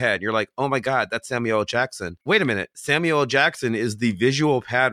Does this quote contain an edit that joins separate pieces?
yes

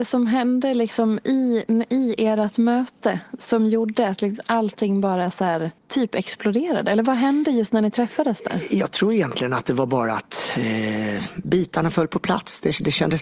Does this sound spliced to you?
yes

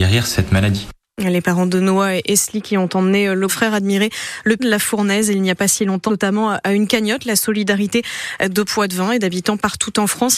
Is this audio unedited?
no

